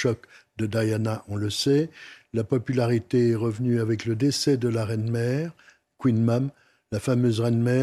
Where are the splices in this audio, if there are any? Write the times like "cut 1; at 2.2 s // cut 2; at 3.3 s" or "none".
none

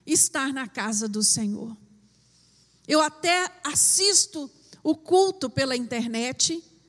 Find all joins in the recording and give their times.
none

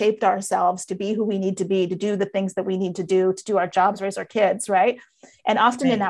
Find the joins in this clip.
none

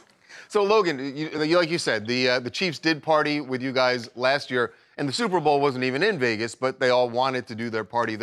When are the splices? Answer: none

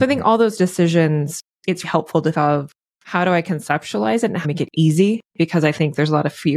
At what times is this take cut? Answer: cut 1; at 1.8 s // cut 2; at 2.3 s // cut 3; at 2.9 s // cut 4; at 4.4 s

